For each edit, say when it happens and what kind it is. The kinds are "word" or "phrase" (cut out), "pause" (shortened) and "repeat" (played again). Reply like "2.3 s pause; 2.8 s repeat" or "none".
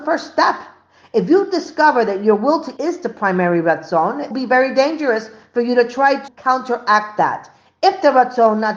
2.8 s word; 4.3 s word; 6.3 s word